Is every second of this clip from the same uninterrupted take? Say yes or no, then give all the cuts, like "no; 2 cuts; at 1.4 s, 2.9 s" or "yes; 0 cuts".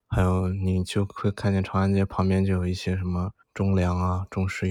no; 1 cut; at 3.4 s